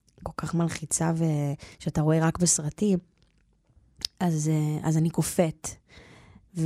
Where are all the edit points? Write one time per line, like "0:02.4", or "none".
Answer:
0:01.7